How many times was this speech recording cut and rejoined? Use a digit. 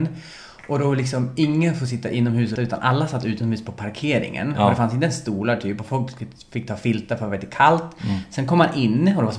1